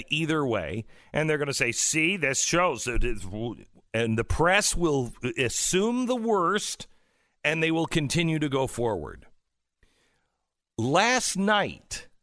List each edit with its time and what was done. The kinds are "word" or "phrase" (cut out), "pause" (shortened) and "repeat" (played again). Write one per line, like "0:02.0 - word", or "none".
none